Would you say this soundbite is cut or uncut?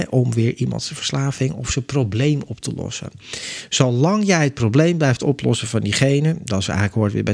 uncut